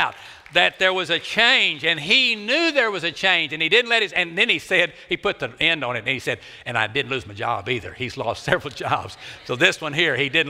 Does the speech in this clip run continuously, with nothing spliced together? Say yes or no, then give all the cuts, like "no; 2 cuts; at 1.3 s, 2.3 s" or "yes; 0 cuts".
yes; 0 cuts